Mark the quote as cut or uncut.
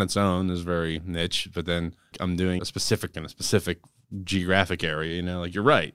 cut